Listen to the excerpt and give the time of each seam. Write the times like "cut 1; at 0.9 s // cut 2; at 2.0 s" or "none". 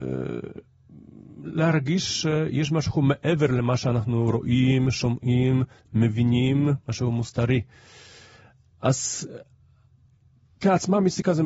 none